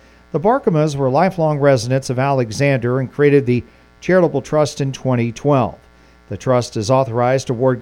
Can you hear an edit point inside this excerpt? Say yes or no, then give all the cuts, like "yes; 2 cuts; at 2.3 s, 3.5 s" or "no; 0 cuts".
no; 0 cuts